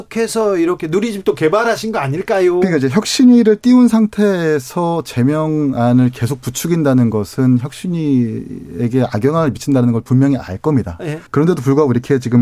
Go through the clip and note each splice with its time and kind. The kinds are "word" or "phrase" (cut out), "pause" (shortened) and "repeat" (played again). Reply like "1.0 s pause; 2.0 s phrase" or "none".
11.3 s pause